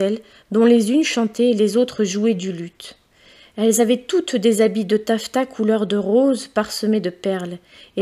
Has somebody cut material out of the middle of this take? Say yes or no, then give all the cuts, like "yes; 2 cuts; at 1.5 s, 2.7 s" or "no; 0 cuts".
no; 0 cuts